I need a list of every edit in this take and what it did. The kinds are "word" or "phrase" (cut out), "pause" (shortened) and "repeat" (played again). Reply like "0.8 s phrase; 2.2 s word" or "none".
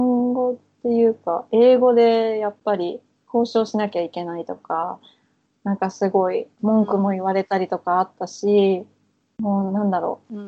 6.5 s pause